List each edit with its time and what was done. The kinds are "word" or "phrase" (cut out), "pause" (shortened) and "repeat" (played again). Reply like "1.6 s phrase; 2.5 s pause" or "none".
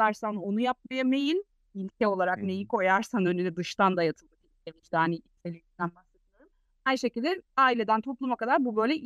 none